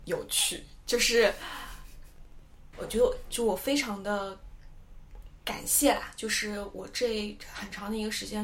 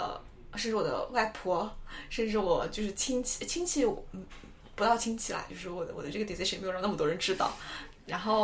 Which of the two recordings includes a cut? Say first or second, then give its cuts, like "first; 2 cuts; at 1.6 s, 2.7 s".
first; 1 cut; at 2.7 s